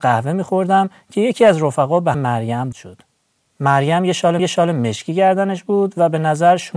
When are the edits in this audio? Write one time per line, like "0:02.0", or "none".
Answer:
0:02.1
0:02.7
0:04.4